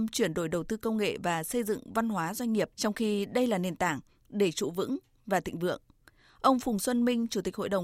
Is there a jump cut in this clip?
no; 0 cuts

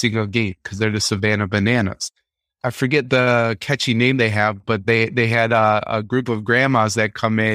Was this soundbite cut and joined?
no; 0 cuts

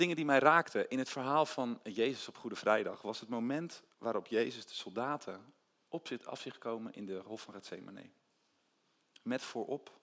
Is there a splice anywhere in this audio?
yes; 1 cut; at 3.9 s

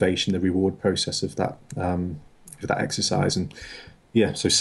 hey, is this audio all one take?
yes; 0 cuts

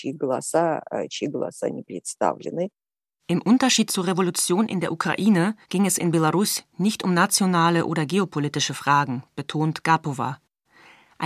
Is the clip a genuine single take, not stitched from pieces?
no; 1 cut; at 5.6 s

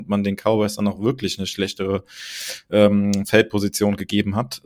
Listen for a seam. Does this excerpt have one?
no; 0 cuts

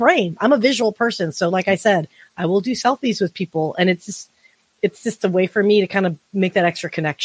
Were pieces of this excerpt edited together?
no; 0 cuts

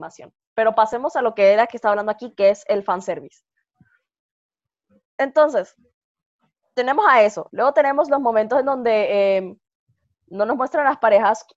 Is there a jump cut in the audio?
no; 0 cuts

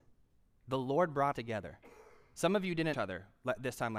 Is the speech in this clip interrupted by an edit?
yes; 2 cuts; at 1.3 s, 2.9 s

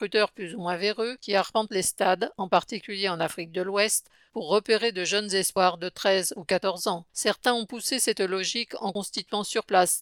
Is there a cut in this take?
yes; 1 cut; at 7.1 s

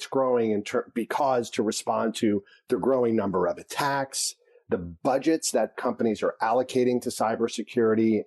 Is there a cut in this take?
no; 0 cuts

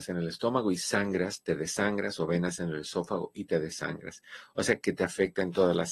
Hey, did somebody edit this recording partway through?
no; 0 cuts

